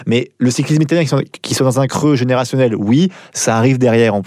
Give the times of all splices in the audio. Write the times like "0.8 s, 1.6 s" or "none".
none